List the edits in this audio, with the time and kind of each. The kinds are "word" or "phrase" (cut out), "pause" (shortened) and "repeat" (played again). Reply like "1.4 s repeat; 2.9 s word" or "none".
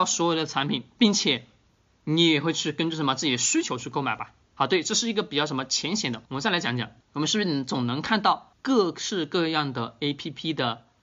1.9 s pause; 4.4 s pause; 6.2 s pause; 7.0 s pause; 8.5 s pause